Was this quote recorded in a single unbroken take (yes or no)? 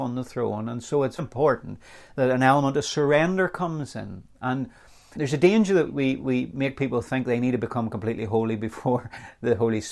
no